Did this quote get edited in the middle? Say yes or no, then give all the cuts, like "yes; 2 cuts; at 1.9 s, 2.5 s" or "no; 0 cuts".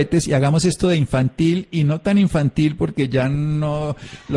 no; 0 cuts